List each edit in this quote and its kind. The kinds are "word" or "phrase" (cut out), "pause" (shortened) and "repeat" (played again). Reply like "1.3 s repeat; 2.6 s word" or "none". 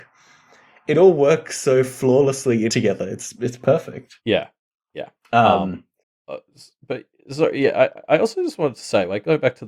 2.7 s phrase; 4.2 s pause; 5.2 s pause